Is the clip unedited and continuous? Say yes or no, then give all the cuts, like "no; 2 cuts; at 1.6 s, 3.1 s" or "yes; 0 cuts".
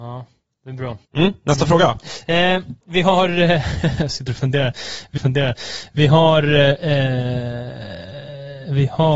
no; 2 cuts; at 1.1 s, 5.2 s